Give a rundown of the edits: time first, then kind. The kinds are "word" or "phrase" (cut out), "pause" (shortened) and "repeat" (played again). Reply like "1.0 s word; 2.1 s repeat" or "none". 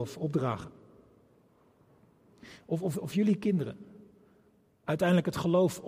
none